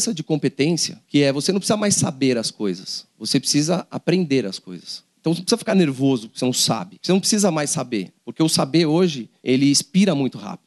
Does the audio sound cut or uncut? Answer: uncut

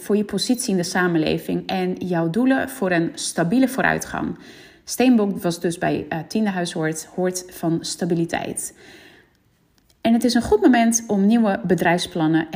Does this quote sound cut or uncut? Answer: uncut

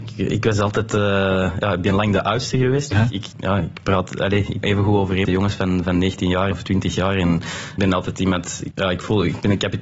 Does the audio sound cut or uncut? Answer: cut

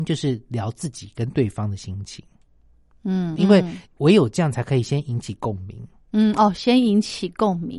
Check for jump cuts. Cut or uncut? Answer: cut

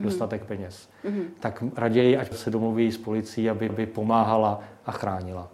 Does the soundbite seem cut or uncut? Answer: cut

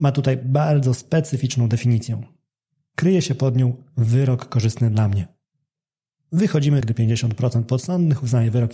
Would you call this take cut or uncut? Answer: cut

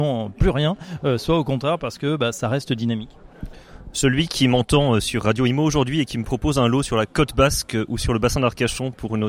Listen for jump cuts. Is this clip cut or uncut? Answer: uncut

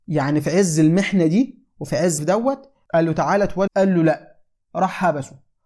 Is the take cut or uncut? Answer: cut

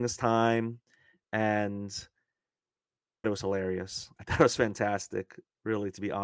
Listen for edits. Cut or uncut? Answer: cut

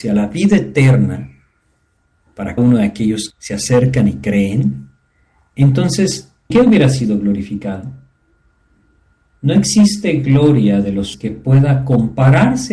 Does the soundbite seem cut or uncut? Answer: cut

